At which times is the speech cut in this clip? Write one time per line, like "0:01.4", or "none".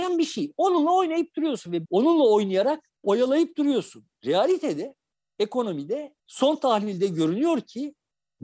0:01.8
0:02.9
0:06.2